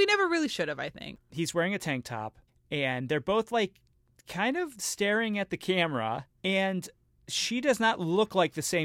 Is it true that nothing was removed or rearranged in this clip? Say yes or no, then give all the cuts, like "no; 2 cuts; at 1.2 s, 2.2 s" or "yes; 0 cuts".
no; 2 cuts; at 2.5 s, 6.3 s